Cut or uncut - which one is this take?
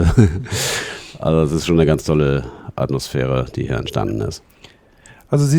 uncut